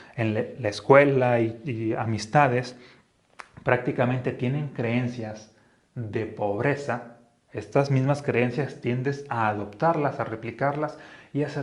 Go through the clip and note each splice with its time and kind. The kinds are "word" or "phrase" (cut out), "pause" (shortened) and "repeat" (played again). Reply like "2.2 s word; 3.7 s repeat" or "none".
none